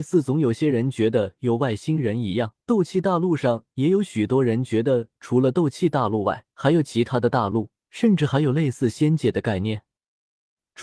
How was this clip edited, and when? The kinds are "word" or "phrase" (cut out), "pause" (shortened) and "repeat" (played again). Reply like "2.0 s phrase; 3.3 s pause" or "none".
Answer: 2.6 s pause; 6.5 s pause; 7.8 s pause